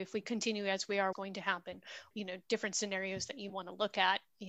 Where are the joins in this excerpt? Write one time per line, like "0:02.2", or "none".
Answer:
0:01.1
0:02.1
0:03.5